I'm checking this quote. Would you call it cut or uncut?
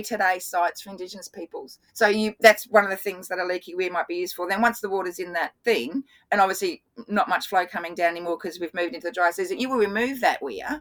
cut